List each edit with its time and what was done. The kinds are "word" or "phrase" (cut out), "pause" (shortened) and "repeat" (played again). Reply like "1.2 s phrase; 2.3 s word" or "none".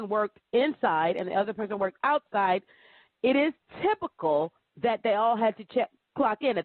none